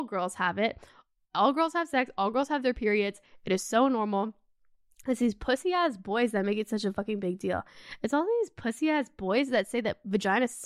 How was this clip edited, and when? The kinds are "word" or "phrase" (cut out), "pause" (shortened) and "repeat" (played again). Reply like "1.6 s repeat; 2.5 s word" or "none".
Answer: none

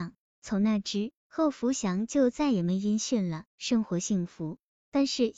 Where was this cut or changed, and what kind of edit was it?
1.2 s pause; 3.5 s pause

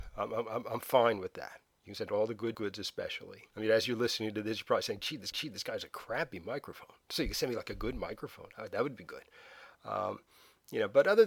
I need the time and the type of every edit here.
2.5 s phrase; 3.5 s pause; 5.3 s repeat

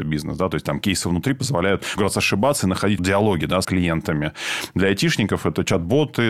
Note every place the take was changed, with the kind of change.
2.0 s word; 3.0 s word; 3.6 s word

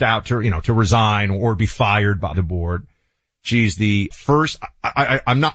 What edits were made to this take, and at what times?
2.3 s word; 4.1 s word

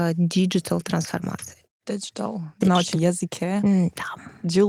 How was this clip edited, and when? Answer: 2.6 s word; 2.9 s word

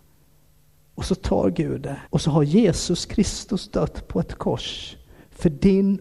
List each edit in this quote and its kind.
2.1 s pause

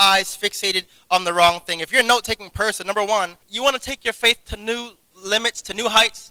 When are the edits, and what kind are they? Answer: 3.4 s pause

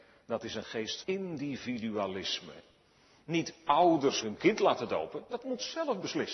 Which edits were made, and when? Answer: 1.0 s word; 4.2 s word; 5.4 s word

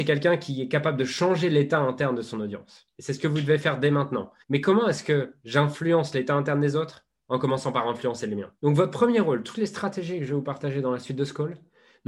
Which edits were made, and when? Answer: 2.9 s pause; 4.4 s pause; 8.6 s pause

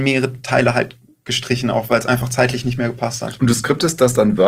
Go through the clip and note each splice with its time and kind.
none

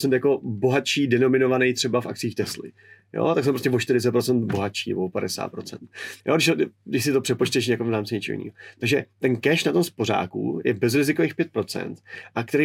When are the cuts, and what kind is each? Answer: 6.2 s pause

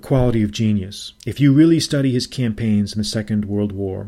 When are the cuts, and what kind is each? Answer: 1.2 s pause

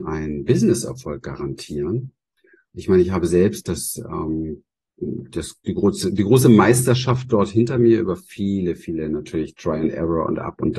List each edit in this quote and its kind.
none

